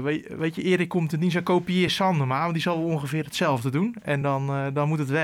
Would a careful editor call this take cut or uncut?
uncut